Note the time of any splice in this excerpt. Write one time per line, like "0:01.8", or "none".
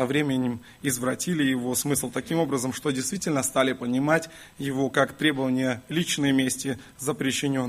none